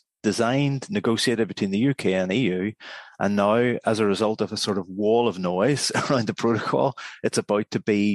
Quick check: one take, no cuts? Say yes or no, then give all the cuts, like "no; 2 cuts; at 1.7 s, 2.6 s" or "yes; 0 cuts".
yes; 0 cuts